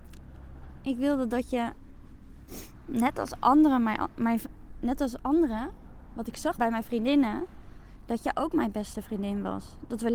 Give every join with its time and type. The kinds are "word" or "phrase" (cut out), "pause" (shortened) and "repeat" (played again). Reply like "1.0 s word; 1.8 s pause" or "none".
6.6 s phrase